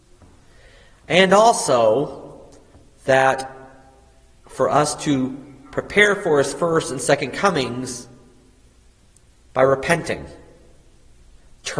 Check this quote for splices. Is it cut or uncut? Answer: uncut